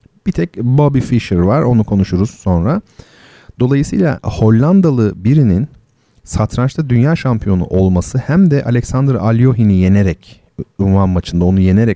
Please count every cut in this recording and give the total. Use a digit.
0